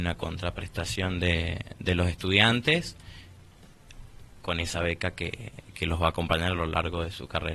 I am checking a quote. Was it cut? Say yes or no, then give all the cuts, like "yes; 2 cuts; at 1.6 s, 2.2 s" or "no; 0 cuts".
no; 0 cuts